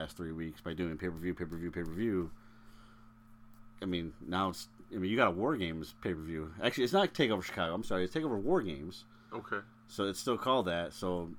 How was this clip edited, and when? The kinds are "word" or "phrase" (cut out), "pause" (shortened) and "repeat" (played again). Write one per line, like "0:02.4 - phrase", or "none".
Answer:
none